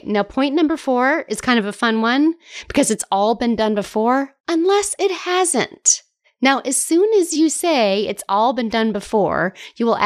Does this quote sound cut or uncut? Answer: cut